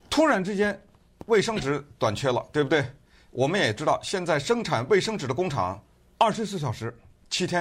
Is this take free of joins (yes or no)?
yes